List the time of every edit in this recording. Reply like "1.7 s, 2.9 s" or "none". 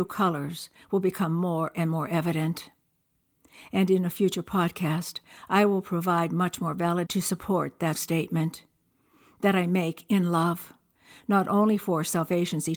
7.1 s, 7.9 s